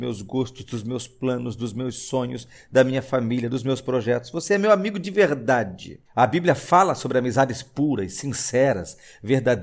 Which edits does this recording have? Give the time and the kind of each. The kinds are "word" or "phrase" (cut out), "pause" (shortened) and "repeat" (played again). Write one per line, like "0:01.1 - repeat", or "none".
0:06.1 - pause